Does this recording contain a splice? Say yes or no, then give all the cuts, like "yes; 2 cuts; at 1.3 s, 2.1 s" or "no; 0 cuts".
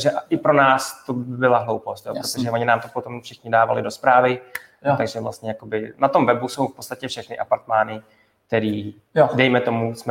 no; 0 cuts